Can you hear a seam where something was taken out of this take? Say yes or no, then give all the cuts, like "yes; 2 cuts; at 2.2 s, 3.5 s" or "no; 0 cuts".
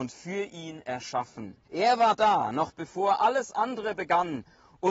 yes; 1 cut; at 1.6 s